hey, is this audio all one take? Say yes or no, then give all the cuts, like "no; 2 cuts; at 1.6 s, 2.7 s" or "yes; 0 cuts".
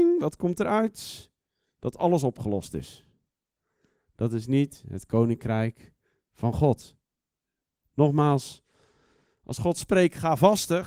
yes; 0 cuts